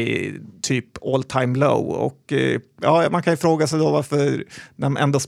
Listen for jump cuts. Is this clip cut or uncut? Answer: uncut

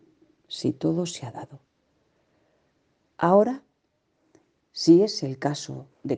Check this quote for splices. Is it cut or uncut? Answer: uncut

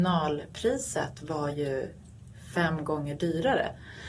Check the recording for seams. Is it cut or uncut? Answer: uncut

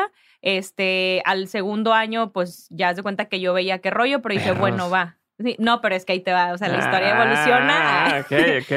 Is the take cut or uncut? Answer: uncut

